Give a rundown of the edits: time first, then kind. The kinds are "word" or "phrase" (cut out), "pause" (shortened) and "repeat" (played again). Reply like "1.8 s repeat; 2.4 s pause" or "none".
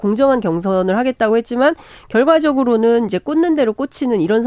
none